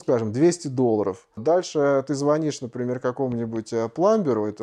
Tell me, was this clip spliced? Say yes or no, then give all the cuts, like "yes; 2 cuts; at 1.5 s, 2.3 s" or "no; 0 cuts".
no; 0 cuts